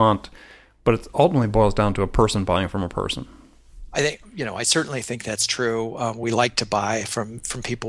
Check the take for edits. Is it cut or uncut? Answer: uncut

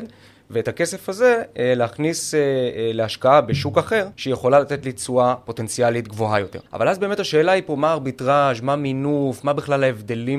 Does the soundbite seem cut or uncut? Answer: cut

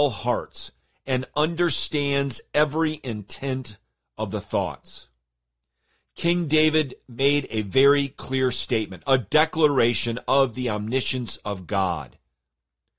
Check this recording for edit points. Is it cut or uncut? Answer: uncut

